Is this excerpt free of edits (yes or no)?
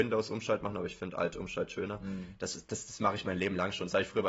yes